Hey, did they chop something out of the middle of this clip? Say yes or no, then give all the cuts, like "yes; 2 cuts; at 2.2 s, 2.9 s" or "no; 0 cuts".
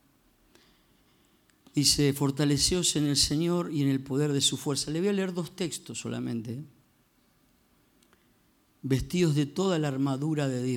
no; 0 cuts